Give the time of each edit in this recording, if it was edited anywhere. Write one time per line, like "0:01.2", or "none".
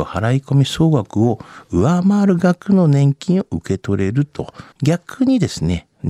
0:04.7